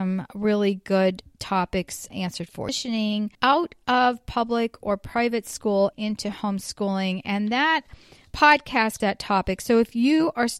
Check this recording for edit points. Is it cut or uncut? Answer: cut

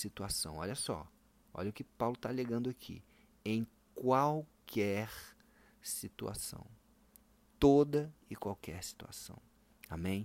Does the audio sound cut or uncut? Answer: uncut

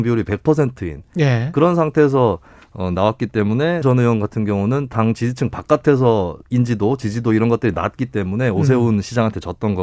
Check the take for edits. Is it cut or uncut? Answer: cut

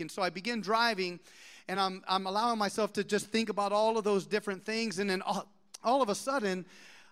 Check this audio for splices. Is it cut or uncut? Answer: uncut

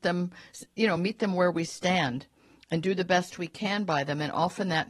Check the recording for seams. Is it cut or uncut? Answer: uncut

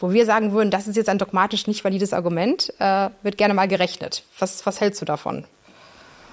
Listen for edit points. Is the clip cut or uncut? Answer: uncut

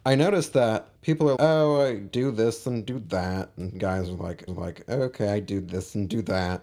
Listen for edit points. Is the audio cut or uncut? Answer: cut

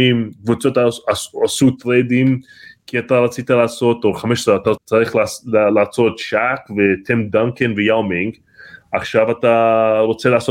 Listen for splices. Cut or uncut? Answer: cut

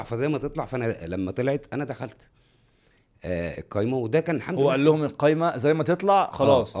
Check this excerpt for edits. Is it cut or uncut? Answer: uncut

